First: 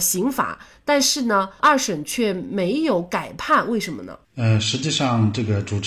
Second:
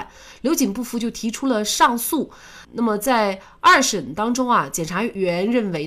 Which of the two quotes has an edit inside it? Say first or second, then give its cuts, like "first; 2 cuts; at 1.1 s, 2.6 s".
first; 1 cut; at 4.2 s